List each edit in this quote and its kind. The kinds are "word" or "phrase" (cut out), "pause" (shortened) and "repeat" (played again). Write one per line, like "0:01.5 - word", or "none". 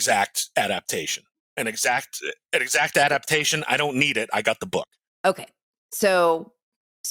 none